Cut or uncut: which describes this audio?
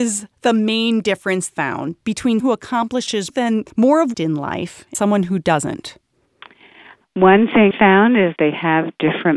cut